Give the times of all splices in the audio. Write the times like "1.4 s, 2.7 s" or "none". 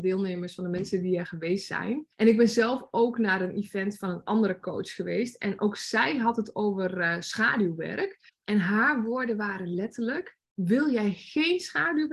2.1 s, 8.3 s, 10.4 s